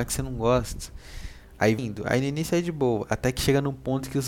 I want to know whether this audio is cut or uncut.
cut